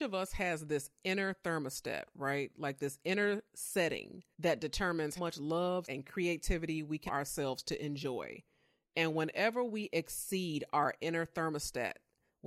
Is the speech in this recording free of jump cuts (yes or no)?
no